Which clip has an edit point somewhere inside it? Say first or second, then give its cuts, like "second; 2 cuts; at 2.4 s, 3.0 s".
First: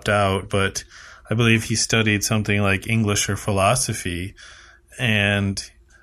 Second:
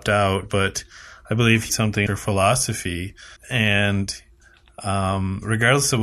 second; 3 cuts; at 1.7 s, 2.1 s, 3.4 s